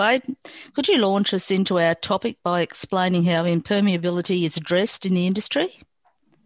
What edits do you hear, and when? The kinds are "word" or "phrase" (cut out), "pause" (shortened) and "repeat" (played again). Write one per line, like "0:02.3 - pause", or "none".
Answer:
none